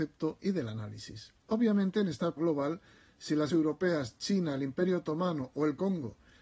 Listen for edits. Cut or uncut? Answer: cut